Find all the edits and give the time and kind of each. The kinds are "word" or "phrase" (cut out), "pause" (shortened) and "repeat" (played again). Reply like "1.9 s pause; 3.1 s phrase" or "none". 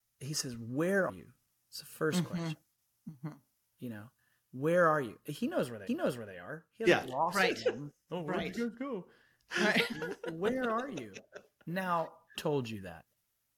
1.1 s word; 5.9 s repeat; 12.3 s word